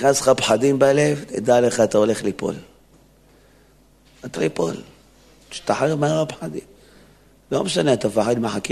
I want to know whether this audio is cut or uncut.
cut